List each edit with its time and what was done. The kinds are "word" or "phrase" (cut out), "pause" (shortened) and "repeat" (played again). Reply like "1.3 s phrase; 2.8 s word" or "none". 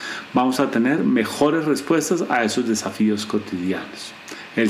none